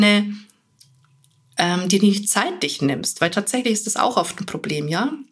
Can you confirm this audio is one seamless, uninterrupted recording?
yes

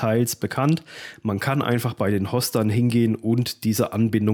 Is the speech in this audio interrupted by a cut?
no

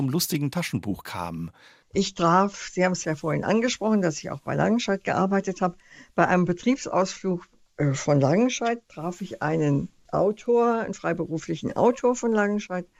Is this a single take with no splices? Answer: yes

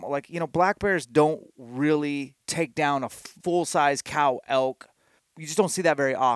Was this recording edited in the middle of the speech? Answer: yes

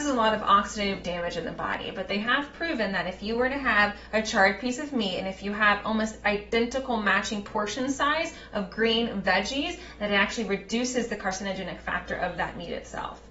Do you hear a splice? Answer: no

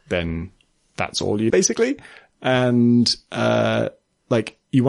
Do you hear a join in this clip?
yes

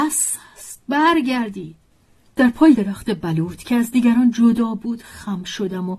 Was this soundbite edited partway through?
yes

